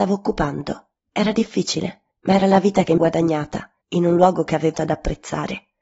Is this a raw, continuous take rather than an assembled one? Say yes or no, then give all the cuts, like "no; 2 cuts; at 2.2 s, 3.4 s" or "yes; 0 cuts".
no; 5 cuts; at 1.0 s, 2.1 s, 3.0 s, 3.8 s, 4.7 s